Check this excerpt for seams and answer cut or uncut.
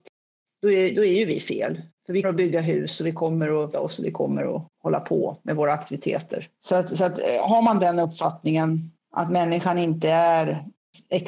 cut